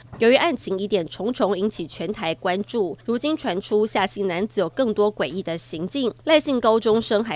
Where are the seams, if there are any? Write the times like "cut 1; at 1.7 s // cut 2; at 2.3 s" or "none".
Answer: cut 1; at 3.0 s // cut 2; at 6.2 s